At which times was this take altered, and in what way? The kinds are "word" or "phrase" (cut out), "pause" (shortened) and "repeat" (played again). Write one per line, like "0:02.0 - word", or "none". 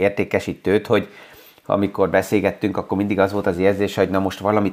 none